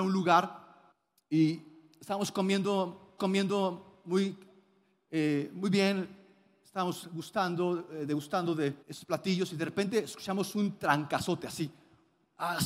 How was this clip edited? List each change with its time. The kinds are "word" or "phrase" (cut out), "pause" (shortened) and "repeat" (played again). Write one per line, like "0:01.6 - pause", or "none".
0:00.9 - pause
0:03.2 - repeat
0:08.8 - pause